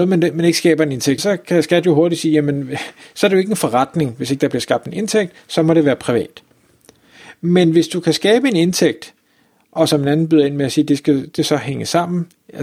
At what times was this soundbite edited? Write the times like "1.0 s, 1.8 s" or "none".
1.2 s, 11.4 s